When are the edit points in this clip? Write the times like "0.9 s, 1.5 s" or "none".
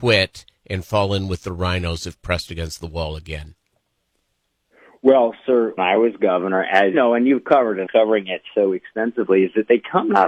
5.8 s, 6.9 s, 7.9 s